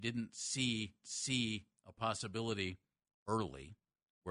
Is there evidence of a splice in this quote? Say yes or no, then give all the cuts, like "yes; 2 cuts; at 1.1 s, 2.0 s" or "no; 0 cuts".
yes; 1 cut; at 1.0 s